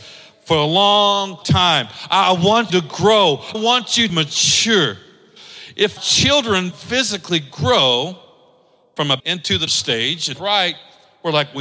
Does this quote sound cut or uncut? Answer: cut